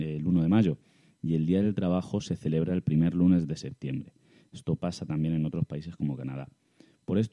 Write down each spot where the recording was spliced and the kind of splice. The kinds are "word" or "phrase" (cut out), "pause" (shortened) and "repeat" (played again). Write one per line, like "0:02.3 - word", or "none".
none